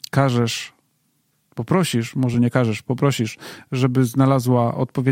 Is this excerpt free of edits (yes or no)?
yes